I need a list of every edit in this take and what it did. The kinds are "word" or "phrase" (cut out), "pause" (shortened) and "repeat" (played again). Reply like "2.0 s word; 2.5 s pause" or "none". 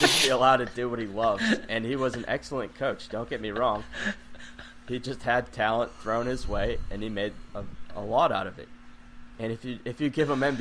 none